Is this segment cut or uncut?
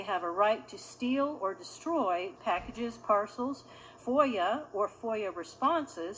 cut